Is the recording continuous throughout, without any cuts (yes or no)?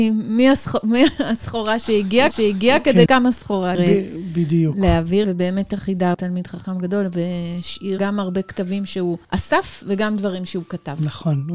no